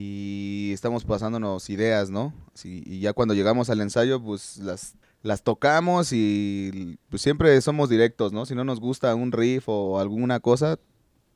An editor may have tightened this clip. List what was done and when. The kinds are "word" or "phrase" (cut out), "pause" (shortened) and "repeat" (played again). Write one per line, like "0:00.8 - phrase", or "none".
0:05.0 - pause
0:07.0 - pause